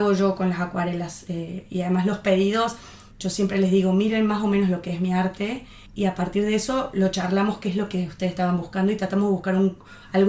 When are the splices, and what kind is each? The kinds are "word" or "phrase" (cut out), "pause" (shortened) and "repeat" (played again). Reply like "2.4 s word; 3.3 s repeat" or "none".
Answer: 3.1 s pause; 5.9 s pause

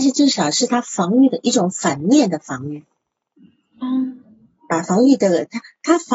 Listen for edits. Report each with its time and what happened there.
none

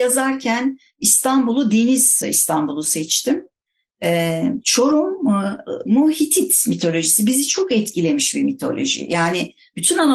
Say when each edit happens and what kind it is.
2.2 s phrase

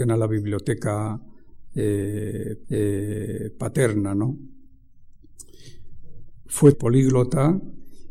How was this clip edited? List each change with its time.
2.6 s repeat; 6.7 s phrase

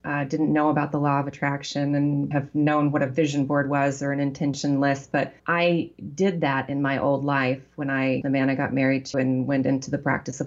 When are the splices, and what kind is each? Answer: 2.3 s word; 5.4 s pause; 8.2 s phrase; 9.1 s word

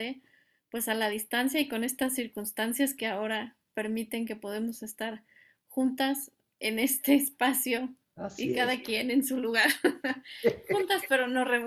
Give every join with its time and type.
none

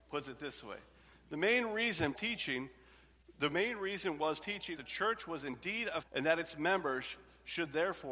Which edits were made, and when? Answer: 2.1 s word; 4.4 s word; 4.8 s word; 6.0 s word

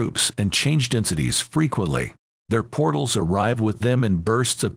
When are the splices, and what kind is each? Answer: 2.3 s pause

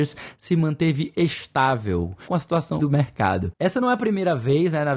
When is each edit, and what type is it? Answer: 2.2 s word; 2.8 s word

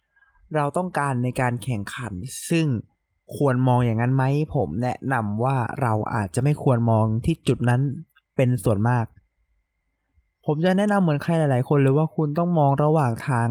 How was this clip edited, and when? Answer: 3.2 s pause

